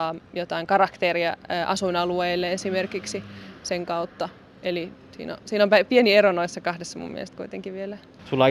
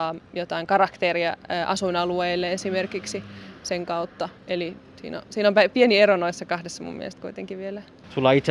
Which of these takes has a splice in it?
second; 1 cut; at 4.4 s

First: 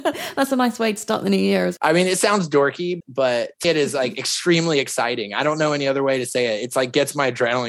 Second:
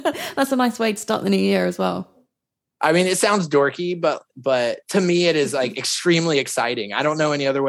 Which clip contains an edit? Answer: first; 3 cuts; at 1.8 s, 3.0 s, 3.6 s

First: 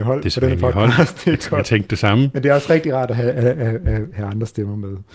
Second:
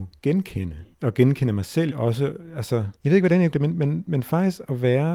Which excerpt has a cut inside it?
second; 5 cuts; at 0.9 s, 1.9 s, 3.0 s, 3.5 s, 4.1 s

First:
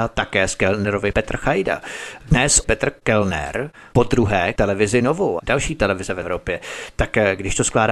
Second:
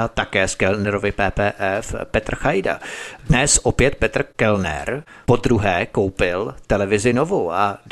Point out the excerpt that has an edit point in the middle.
first; 5 cuts; at 1.1 s, 2.6 s, 4.6 s, 5.4 s, 6.2 s

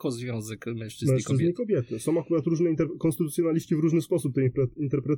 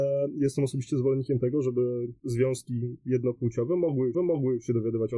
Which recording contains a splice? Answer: second; 1 cut; at 4.1 s

